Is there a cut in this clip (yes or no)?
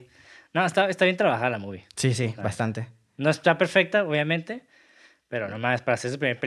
no